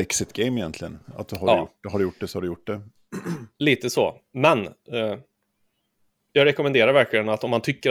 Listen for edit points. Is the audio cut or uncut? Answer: uncut